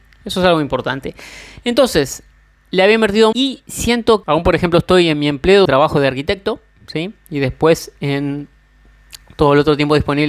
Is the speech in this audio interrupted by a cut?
yes; 3 cuts; at 3.3 s, 4.2 s, 5.7 s

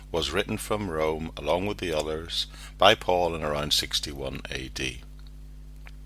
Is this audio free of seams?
yes; 0 cuts

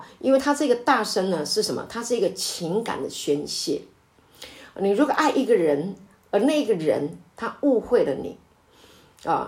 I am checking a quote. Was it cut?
no; 0 cuts

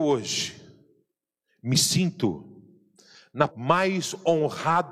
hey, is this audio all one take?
no; 1 cut; at 3.5 s

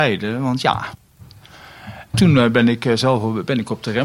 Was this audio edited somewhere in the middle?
no; 0 cuts

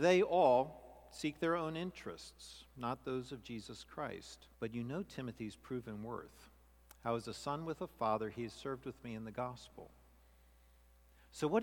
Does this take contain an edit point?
yes; 1 cut; at 4.5 s

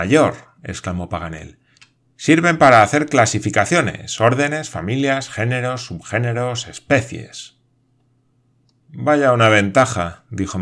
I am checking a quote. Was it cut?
no; 0 cuts

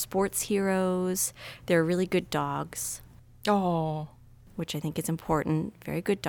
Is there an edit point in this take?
no; 0 cuts

